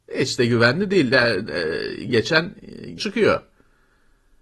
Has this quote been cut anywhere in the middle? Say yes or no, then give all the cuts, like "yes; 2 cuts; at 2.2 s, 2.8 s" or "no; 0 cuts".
yes; 2 cuts; at 2.1 s, 3.0 s